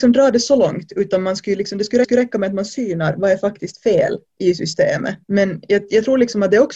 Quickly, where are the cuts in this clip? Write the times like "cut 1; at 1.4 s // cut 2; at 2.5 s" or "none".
cut 1; at 2.0 s // cut 2; at 4.3 s // cut 3; at 5.2 s